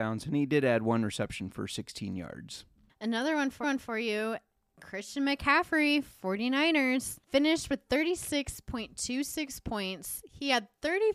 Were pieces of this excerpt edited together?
yes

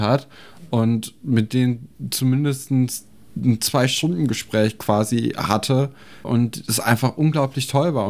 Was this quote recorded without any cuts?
yes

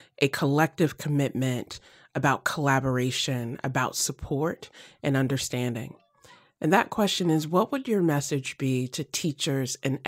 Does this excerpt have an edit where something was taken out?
no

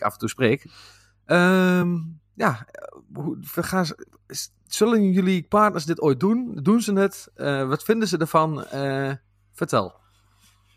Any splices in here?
no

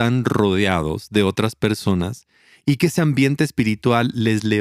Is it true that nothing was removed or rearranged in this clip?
yes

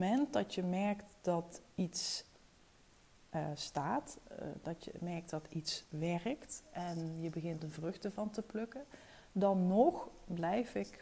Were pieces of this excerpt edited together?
yes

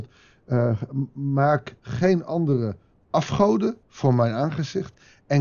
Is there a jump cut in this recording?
yes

